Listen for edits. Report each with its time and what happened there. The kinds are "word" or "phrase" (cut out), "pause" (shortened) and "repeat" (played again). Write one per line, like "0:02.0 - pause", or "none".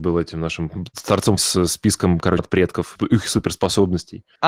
0:01.4 - word
0:02.4 - phrase
0:03.0 - word